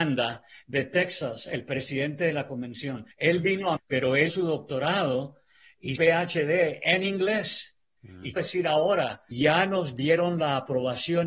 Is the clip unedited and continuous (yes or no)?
no